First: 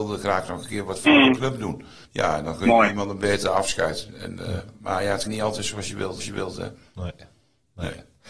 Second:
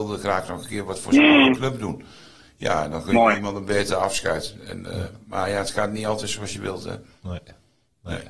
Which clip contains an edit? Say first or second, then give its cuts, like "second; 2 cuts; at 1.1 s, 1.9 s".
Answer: first; 4 cuts; at 1.1 s, 2.0 s, 5.3 s, 6.2 s